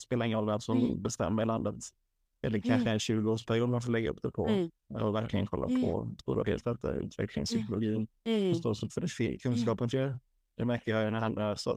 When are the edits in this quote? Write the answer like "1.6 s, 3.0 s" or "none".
4.8 s, 6.2 s, 8.2 s, 8.9 s, 9.9 s